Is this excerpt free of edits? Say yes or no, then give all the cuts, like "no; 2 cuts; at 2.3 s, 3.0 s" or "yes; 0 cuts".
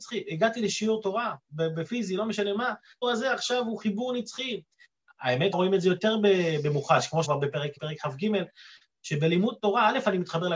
no; 5 cuts; at 1.4 s, 3.0 s, 5.5 s, 7.2 s, 7.8 s